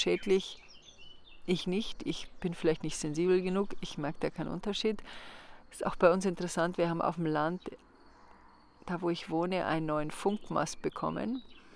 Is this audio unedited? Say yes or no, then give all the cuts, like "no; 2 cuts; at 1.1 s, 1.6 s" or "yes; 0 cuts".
yes; 0 cuts